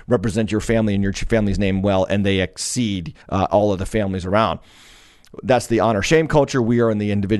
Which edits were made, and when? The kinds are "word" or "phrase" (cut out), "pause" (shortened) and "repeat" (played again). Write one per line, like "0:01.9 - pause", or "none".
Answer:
0:03.2 - pause